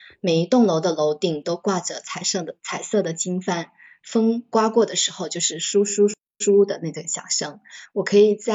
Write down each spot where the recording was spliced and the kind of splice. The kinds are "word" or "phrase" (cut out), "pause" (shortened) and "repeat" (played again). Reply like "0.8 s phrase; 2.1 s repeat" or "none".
none